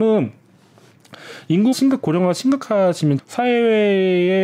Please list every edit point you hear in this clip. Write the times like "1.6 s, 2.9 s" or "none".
1.7 s, 3.2 s